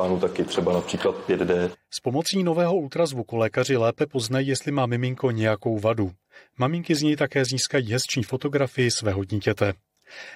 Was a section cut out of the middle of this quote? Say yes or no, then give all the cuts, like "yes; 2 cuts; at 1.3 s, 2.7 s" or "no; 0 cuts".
no; 0 cuts